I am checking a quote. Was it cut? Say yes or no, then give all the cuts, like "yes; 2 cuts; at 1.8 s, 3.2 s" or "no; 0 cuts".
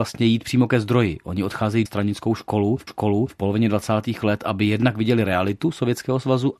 yes; 2 cuts; at 1.9 s, 2.9 s